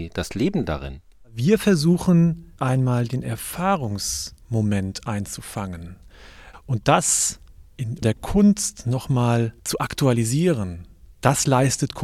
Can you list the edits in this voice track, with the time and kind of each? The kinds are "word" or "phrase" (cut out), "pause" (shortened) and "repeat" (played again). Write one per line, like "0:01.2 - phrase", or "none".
0:02.6 - word
0:08.0 - word